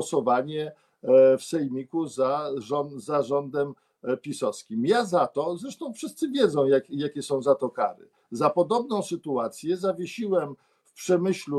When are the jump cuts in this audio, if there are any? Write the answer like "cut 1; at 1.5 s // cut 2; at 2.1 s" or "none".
none